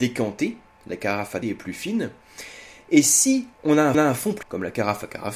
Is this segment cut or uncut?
cut